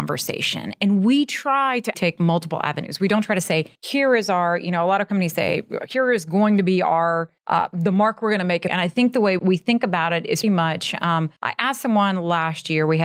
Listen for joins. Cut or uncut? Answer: cut